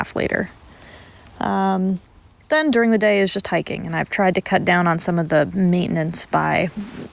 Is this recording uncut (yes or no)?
yes